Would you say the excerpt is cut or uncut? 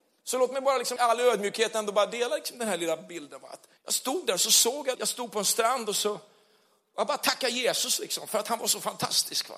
cut